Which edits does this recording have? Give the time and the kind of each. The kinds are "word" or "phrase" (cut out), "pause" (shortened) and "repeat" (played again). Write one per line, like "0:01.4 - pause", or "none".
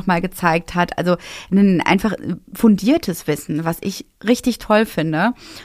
none